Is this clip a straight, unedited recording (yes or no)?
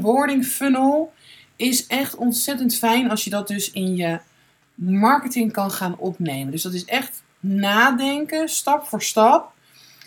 yes